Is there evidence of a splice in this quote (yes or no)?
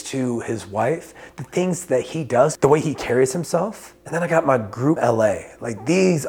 yes